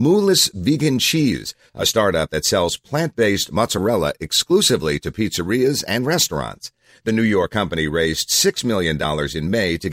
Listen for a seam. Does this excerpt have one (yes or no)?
no